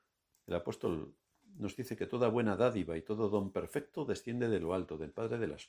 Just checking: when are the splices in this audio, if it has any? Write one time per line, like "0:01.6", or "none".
none